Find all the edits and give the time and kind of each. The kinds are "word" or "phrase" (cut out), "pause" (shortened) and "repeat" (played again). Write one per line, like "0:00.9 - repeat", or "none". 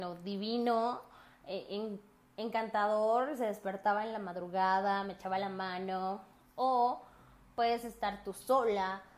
0:06.3 - pause

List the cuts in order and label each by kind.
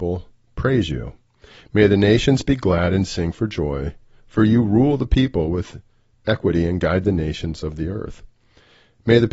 none

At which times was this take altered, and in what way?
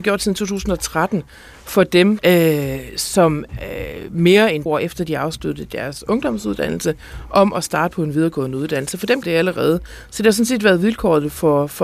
0:02.2 - word
0:03.5 - word
0:04.7 - word
0:09.2 - word

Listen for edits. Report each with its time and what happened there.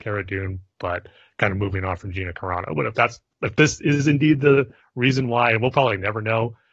none

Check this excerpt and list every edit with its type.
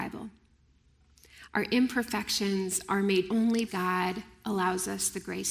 0:03.3 - word
0:03.7 - word

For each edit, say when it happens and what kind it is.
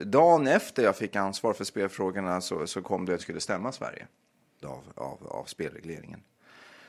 0:03.2 - phrase
0:04.6 - phrase

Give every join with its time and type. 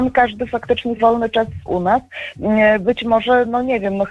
0:01.0 - word
0:01.7 - word

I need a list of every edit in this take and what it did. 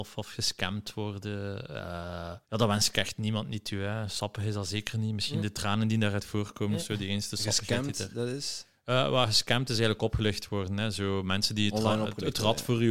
0:02.4 - pause

